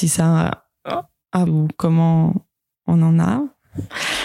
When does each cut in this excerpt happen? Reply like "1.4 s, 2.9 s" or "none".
1.5 s